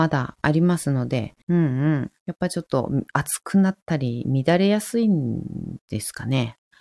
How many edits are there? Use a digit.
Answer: 3